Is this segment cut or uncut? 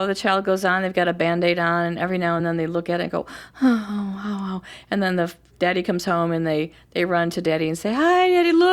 uncut